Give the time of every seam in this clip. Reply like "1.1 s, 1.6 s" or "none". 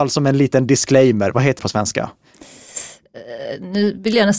1.6 s